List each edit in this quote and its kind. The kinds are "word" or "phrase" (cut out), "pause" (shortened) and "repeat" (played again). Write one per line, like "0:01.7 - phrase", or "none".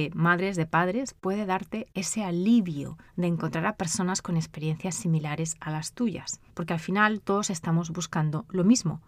0:03.1 - pause
0:06.5 - pause